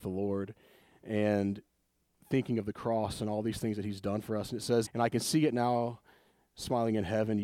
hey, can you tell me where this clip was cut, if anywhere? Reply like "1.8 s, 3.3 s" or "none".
4.9 s